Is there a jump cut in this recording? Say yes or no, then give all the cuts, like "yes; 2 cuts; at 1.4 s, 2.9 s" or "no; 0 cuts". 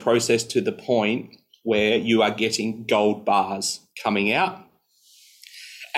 no; 0 cuts